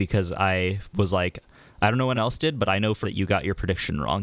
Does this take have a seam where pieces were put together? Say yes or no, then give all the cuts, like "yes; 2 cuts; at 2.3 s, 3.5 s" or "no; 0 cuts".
yes; 2 cuts; at 2.2 s, 3.0 s